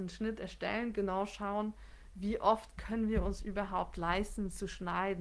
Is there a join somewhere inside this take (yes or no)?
no